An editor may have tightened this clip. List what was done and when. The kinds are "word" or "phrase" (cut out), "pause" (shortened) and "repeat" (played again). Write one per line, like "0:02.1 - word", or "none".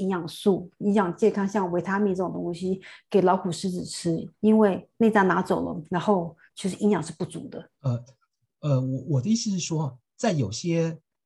0:04.3 - pause
0:06.5 - pause
0:07.7 - pause